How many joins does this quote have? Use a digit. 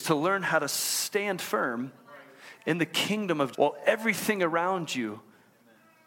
1